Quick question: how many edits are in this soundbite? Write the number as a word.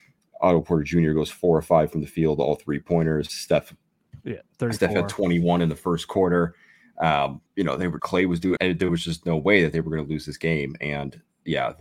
three